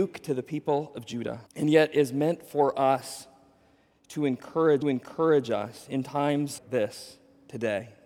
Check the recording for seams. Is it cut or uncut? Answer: cut